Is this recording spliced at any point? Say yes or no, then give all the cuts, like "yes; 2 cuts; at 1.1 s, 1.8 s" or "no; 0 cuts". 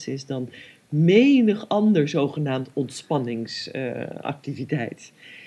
no; 0 cuts